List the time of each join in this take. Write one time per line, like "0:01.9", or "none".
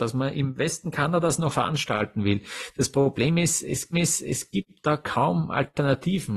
0:01.5
0:03.9